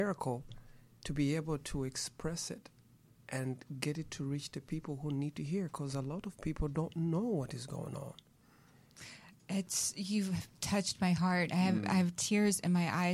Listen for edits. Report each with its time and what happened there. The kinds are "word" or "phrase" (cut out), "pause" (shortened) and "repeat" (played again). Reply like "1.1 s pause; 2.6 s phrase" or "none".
none